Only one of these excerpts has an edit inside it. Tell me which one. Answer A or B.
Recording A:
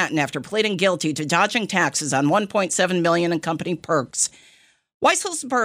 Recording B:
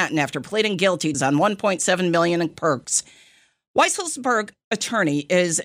B